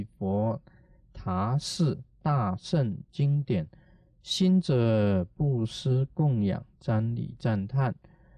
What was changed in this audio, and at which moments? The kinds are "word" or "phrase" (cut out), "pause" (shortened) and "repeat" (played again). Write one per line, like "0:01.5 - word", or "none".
none